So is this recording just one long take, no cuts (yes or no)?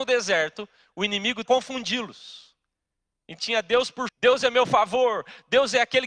no